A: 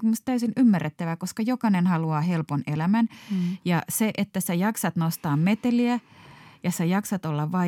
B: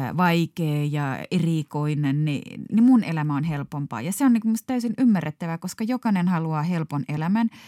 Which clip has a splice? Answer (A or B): B